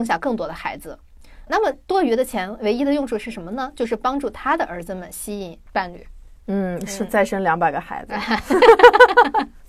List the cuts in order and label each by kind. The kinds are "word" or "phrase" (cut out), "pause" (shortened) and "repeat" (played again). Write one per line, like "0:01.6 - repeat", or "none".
0:01.5 - word